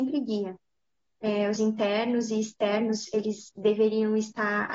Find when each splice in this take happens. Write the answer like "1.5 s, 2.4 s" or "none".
1.6 s